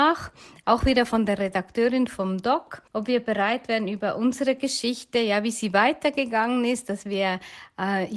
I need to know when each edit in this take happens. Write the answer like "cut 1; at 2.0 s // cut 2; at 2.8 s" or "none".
cut 1; at 2.9 s